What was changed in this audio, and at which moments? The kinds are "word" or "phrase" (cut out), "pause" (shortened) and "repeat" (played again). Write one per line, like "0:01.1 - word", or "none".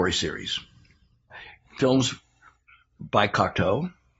0:01.7 - word